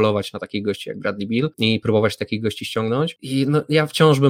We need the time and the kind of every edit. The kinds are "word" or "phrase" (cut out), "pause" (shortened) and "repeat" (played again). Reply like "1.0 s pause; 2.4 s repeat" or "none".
none